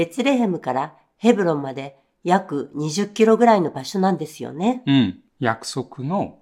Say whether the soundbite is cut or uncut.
cut